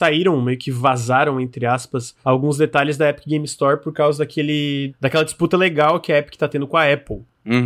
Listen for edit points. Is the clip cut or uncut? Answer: uncut